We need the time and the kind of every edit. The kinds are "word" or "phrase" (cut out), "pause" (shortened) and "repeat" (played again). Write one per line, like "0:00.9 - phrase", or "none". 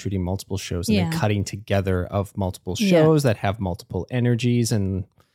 none